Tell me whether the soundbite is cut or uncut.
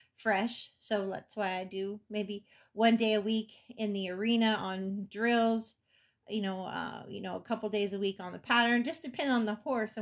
uncut